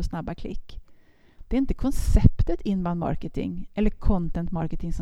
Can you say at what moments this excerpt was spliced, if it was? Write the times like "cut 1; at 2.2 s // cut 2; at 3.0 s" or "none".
none